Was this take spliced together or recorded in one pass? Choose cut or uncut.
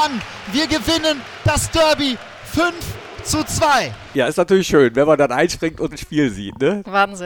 cut